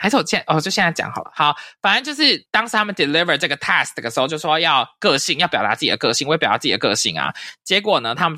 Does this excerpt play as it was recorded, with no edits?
yes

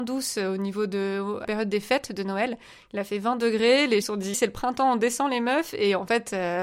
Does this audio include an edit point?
yes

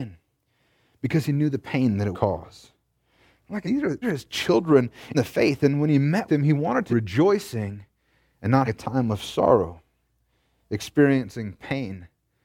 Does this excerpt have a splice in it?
yes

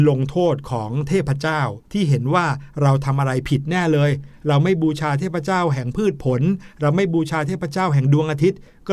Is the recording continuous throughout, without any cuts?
no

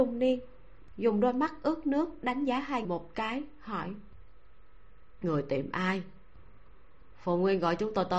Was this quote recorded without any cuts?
no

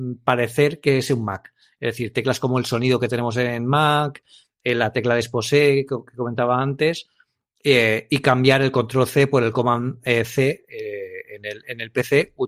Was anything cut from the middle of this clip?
no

